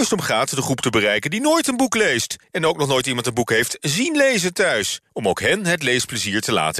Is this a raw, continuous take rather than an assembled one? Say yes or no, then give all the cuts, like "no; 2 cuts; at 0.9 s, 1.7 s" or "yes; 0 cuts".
no; 1 cut; at 5.1 s